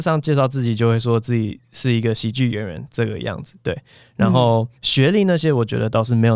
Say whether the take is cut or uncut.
cut